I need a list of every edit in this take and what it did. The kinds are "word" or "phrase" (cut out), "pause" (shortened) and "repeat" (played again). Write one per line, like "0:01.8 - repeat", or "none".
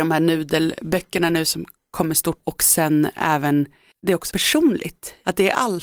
0:04.3 - word